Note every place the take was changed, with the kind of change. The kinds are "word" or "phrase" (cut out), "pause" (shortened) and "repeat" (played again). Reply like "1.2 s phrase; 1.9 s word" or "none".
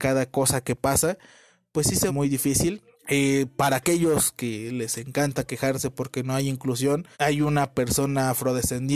2.1 s word; 2.9 s pause; 7.1 s pause